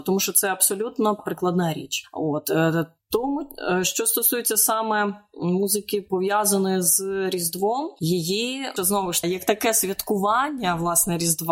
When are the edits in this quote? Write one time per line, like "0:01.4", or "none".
0:08.8
0:09.2